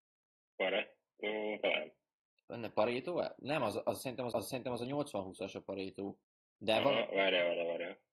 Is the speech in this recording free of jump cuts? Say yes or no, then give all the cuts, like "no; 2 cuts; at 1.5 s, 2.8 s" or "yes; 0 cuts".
no; 2 cuts; at 4.3 s, 6.2 s